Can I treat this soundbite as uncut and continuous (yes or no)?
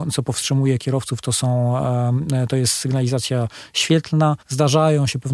no